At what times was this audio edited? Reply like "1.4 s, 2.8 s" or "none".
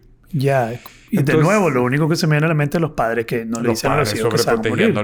none